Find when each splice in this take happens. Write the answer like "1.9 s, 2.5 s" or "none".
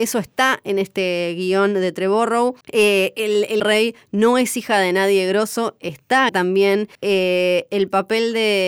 2.6 s, 3.6 s, 6.3 s, 6.9 s